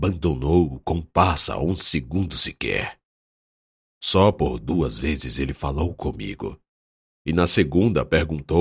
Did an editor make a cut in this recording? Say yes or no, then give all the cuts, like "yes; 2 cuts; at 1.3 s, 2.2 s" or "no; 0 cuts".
no; 0 cuts